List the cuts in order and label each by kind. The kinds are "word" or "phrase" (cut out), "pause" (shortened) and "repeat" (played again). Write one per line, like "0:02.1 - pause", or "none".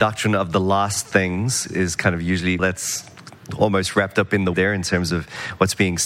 0:01.7 - word
0:02.6 - word
0:04.5 - word